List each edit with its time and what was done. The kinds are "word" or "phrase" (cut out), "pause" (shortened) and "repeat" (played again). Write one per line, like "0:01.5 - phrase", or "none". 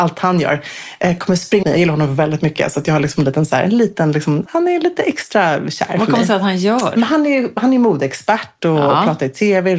0:01.6 - word
0:04.5 - word